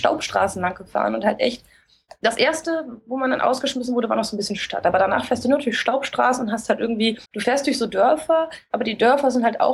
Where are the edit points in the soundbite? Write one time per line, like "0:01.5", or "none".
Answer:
0:07.2